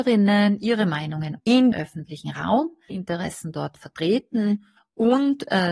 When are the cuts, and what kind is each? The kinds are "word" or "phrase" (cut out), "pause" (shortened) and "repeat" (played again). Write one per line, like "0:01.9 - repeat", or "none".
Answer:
0:01.4 - word
0:01.7 - word
0:02.9 - word